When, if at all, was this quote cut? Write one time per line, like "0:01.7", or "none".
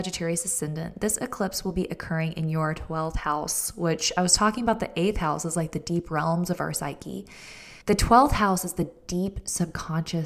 0:07.8